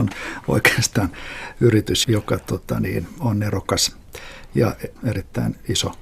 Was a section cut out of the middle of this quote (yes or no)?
yes